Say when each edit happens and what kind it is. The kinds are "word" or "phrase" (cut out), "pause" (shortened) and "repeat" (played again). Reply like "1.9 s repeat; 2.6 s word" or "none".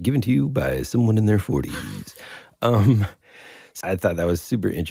3.8 s word